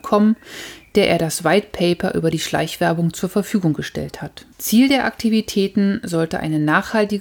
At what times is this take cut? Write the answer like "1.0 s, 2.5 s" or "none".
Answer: 4.5 s

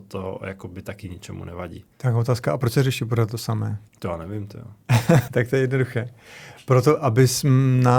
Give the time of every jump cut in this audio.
1.9 s, 3.9 s, 5.3 s

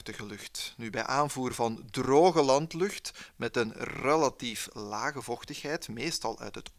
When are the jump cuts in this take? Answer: none

